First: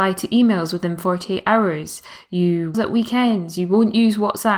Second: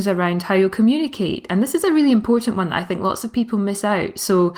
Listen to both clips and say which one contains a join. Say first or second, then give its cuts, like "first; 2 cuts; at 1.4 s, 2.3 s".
first; 1 cut; at 2.7 s